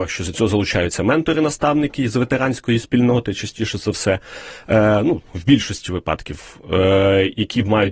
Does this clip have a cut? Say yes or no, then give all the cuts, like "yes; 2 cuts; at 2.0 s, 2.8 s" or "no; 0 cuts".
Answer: no; 0 cuts